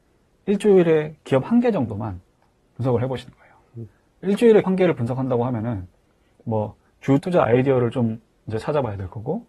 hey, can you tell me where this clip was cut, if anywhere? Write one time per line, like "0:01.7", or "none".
0:04.6
0:07.2